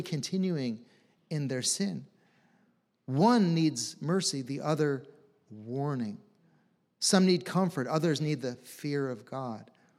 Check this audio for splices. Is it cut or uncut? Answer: uncut